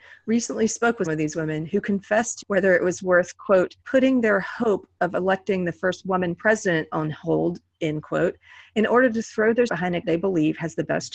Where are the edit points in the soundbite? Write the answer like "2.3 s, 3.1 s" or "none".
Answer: 1.1 s, 2.4 s, 3.8 s, 9.7 s, 10.0 s